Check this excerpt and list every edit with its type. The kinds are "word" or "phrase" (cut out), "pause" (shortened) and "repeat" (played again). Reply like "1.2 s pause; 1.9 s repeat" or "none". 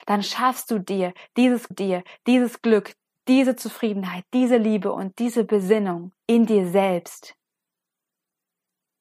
1.7 s repeat; 6.2 s pause

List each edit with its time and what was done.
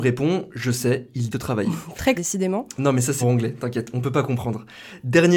1.3 s word; 2.1 s word; 3.2 s word

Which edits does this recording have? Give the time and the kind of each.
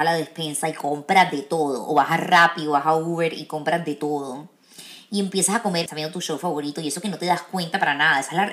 5.9 s phrase

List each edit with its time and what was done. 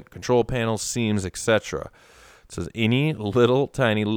none

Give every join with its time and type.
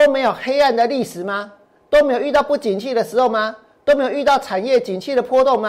none

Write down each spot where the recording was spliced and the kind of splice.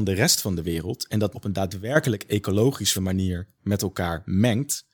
1.3 s word; 2.9 s word

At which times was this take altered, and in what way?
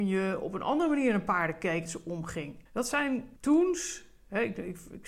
1.9 s word; 2.7 s pause; 3.4 s pause

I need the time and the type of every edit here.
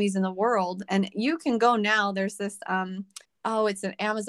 3.2 s pause

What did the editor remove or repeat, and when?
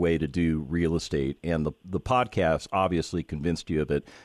none

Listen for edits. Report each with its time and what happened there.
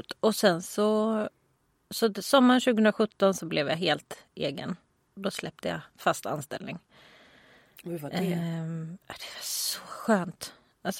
none

